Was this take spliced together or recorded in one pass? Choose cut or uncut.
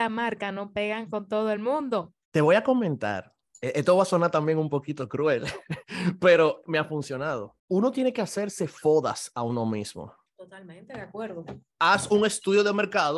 cut